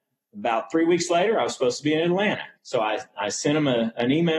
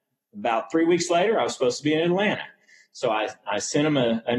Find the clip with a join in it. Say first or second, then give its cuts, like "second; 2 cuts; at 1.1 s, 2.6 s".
first; 1 cut; at 2.6 s